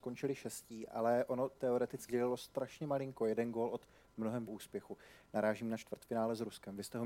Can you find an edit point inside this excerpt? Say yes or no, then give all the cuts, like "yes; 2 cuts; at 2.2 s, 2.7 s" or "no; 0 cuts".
yes; 3 cuts; at 1.6 s, 2.1 s, 4.5 s